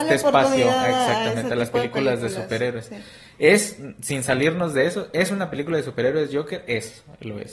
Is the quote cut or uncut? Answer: uncut